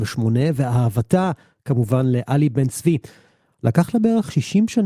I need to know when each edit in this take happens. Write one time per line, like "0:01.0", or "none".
none